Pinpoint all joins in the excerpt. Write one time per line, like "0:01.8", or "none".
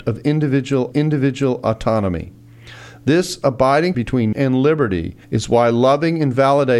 0:00.9
0:03.9
0:04.3
0:05.2